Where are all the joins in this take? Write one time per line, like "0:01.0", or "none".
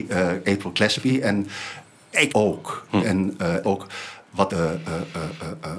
0:02.3
0:03.6
0:04.5